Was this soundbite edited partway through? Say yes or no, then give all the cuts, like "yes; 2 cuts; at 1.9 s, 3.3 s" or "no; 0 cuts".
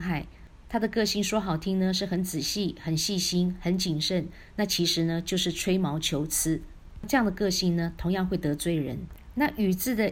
no; 0 cuts